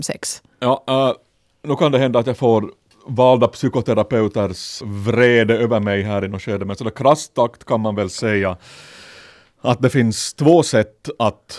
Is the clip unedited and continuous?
no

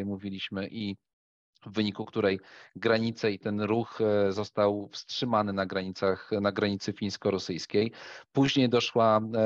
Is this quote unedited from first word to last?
yes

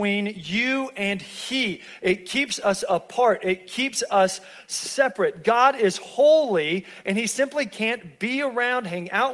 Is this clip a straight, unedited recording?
yes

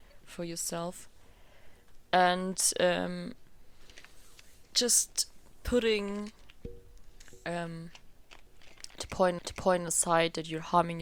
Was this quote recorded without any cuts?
no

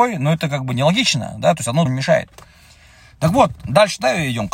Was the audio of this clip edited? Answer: yes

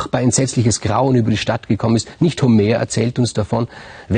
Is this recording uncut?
yes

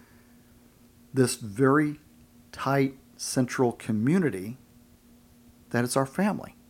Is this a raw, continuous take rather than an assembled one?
yes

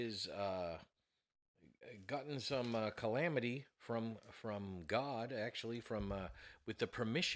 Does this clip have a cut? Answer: no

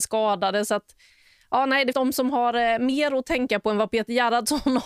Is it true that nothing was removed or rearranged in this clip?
no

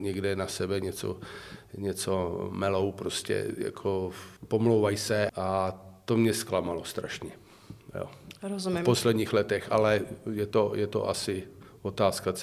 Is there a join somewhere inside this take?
yes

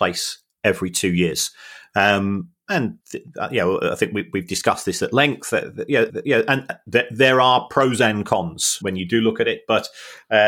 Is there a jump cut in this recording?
yes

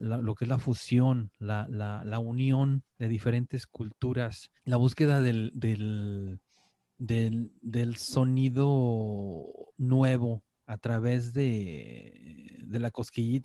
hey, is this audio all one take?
no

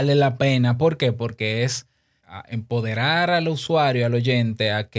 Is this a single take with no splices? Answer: no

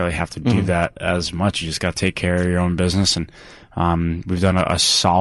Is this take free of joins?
yes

